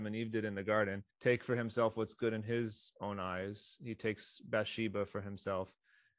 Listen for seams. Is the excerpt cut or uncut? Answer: cut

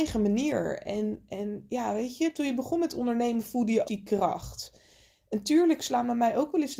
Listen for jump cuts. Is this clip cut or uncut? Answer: cut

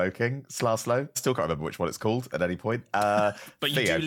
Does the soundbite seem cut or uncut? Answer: uncut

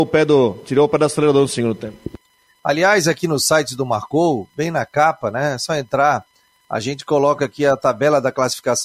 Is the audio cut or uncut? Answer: uncut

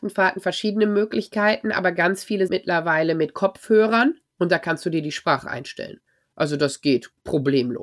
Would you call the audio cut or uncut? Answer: cut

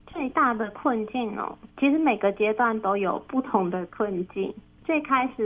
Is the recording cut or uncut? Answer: cut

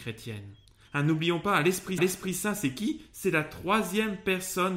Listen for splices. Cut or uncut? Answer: cut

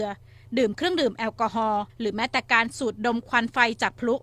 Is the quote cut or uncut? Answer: cut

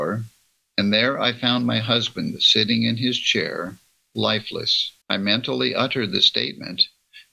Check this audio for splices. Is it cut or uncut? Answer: cut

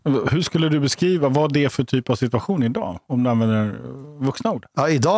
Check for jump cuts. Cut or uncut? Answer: uncut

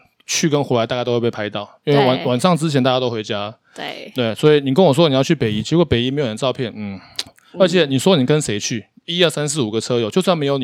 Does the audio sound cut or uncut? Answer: cut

